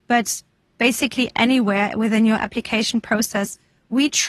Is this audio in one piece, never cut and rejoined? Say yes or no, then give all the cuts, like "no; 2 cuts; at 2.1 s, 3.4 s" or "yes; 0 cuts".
yes; 0 cuts